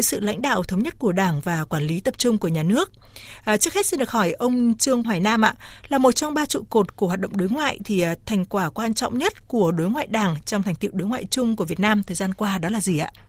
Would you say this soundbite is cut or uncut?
cut